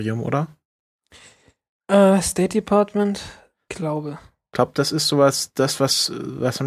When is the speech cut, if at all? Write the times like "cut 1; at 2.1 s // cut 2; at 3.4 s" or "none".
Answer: cut 1; at 3.7 s